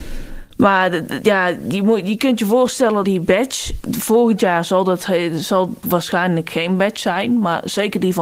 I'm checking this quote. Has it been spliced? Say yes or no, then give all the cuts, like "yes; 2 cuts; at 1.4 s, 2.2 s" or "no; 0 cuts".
yes; 2 cuts; at 3.0 s, 5.8 s